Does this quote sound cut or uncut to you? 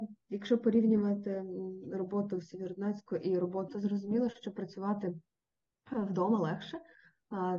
cut